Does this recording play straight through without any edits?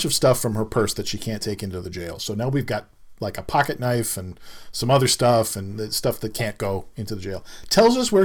yes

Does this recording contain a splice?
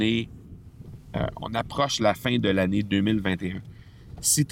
no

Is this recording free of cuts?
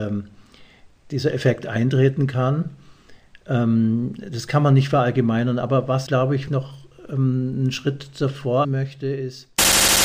no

